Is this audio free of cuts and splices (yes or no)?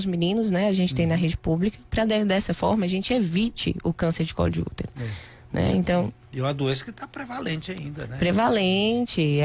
yes